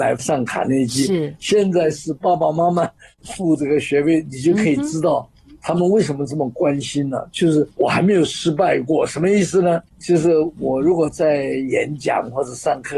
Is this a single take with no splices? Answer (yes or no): no